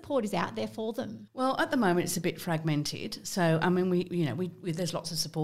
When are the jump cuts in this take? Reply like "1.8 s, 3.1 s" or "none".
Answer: none